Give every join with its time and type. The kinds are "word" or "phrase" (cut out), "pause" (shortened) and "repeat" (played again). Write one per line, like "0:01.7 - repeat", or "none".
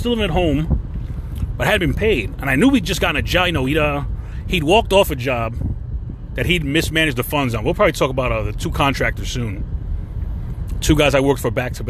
none